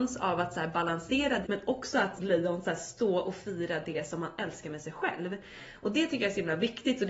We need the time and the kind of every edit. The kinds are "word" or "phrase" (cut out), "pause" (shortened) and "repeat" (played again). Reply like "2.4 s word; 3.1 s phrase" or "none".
1.4 s phrase; 2.2 s word

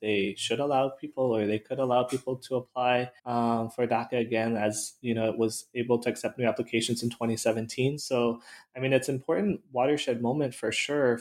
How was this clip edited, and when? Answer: 3.2 s pause

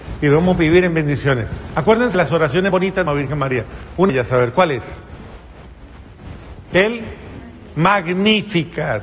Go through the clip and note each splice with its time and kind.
2.1 s word; 2.7 s word; 3.1 s phrase; 4.1 s word

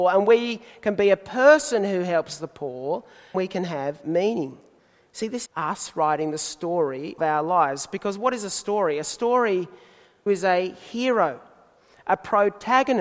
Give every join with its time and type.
3.3 s word; 4.8 s pause; 5.5 s word; 7.2 s word; 10.3 s phrase

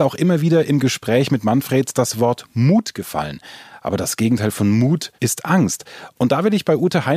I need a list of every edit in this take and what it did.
5.2 s pause

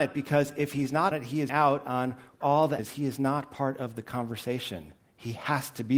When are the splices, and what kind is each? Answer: 1.1 s word; 1.5 s word; 2.4 s word; 2.8 s word; 5.0 s pause

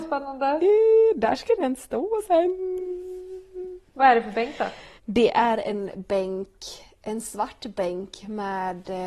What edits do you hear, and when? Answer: 3.9 s pause; 5.0 s pause

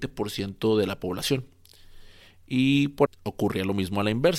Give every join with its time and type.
3.1 s word

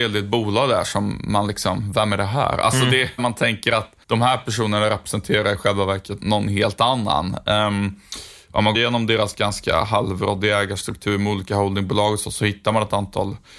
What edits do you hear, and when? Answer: 3.2 s word; 4.0 s pause; 6.2 s word; 8.7 s word

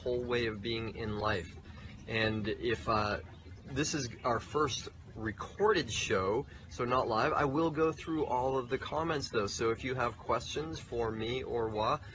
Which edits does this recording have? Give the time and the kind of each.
none

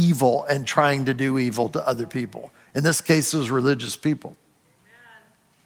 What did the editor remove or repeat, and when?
none

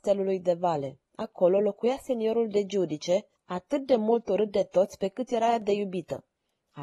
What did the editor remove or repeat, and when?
1.0 s pause; 3.4 s pause

